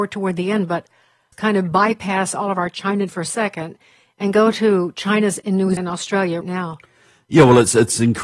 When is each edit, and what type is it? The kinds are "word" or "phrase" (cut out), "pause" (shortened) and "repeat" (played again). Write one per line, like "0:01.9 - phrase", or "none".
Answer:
0:01.3 - word
0:03.1 - word
0:05.4 - word
0:05.8 - word
0:06.4 - word